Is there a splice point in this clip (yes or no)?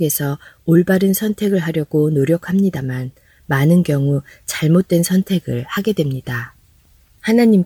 no